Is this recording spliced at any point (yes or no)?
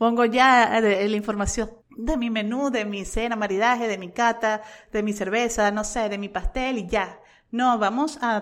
yes